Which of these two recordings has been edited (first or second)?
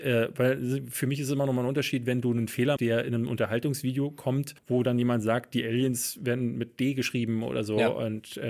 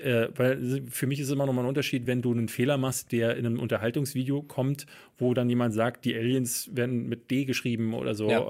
first